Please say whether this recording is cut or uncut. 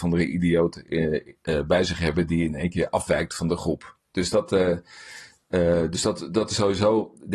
uncut